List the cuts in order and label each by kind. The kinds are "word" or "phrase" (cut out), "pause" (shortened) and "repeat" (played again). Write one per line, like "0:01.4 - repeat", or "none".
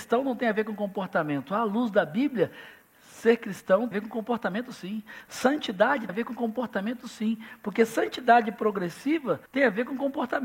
0:03.9 - phrase
0:06.1 - word
0:09.5 - pause